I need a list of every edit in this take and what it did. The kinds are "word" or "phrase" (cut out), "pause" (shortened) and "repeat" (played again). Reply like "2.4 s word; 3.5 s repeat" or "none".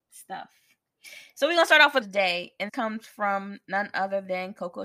2.0 s phrase; 2.7 s word